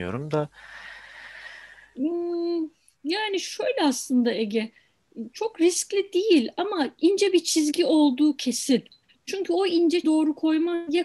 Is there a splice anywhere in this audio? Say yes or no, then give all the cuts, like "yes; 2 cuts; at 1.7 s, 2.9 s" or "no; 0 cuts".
yes; 1 cut; at 10.0 s